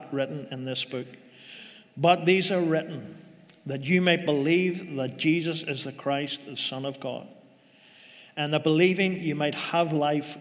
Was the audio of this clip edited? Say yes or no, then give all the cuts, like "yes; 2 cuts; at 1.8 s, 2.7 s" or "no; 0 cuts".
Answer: no; 0 cuts